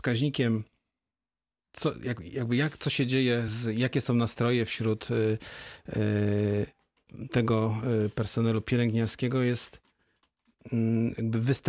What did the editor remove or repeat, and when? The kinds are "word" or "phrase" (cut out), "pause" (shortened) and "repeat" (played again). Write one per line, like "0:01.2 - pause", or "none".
none